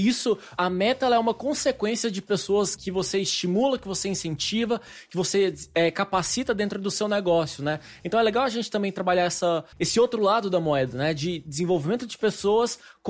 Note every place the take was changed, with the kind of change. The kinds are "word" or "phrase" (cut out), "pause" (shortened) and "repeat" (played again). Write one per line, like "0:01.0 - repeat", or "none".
0:02.8 - word
0:09.7 - pause